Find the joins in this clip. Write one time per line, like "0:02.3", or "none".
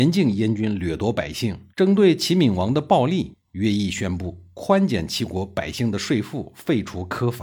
0:01.7